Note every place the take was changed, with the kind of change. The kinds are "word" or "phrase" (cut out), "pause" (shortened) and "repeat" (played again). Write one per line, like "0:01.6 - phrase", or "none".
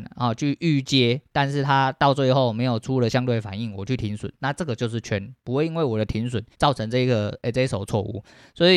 0:05.4 - pause
0:06.5 - pause

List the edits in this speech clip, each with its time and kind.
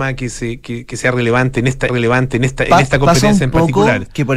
0:01.9 - repeat

